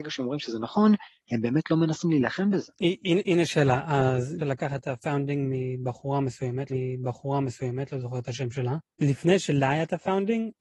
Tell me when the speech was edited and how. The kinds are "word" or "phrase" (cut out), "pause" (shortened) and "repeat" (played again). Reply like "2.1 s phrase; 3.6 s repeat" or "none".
4.4 s word; 6.7 s repeat; 8.9 s pause

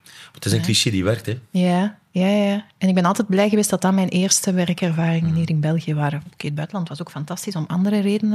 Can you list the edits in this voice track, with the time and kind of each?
none

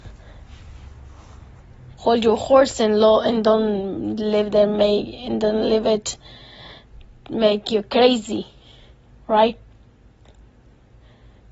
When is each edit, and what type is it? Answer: 1.9 s pause

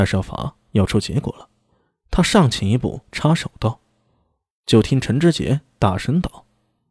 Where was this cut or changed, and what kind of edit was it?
none

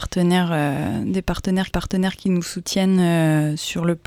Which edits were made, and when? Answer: 1.7 s repeat

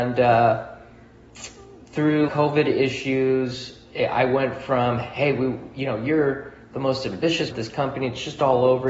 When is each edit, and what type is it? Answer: 2.3 s word; 7.5 s word

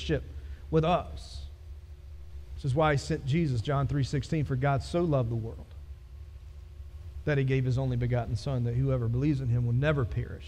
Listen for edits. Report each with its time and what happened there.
none

